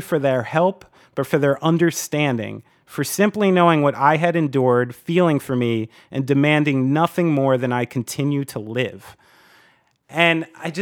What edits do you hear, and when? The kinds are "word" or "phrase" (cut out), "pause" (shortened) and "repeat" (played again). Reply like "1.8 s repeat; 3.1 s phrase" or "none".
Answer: none